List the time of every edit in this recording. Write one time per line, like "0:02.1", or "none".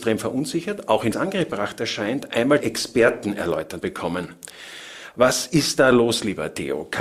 0:01.1
0:02.6
0:03.8